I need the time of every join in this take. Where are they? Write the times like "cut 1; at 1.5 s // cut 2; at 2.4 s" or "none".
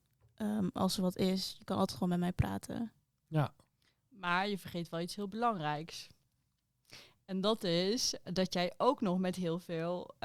cut 1; at 8.2 s